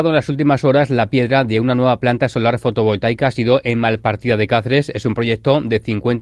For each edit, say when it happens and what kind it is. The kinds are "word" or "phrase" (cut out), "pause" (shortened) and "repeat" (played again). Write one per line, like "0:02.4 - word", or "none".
0:01.1 - word

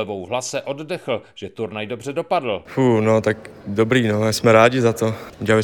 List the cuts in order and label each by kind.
none

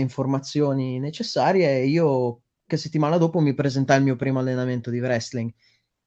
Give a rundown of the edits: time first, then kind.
0:02.7 - word

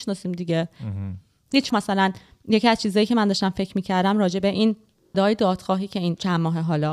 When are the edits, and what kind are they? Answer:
0:01.7 - word
0:05.1 - word

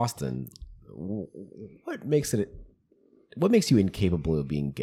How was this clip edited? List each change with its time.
none

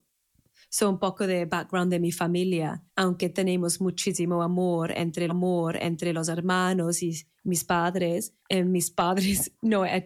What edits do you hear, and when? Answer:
0:02.9 - pause
0:05.3 - repeat
0:08.4 - pause

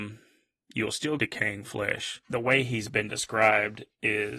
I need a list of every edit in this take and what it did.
0:01.2 - phrase

